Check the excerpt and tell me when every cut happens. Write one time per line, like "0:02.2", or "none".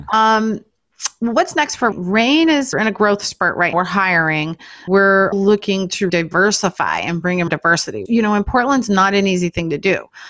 0:01.9
0:02.7
0:03.7
0:04.9
0:05.3
0:06.1
0:07.5
0:08.1